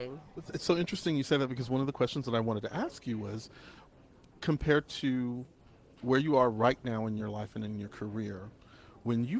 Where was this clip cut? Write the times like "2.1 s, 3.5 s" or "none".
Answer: none